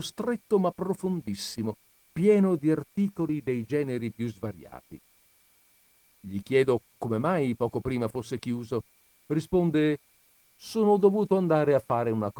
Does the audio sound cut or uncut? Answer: uncut